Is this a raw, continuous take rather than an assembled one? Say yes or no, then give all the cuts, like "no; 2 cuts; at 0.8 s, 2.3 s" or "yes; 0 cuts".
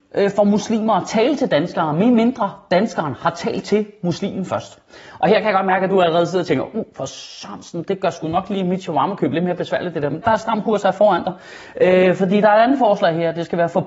no; 1 cut; at 10.2 s